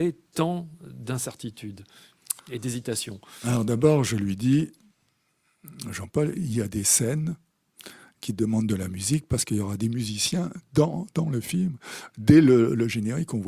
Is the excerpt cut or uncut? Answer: cut